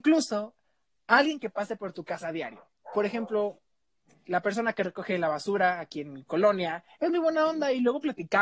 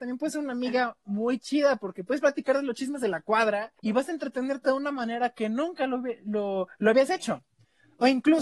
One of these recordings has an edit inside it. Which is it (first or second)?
second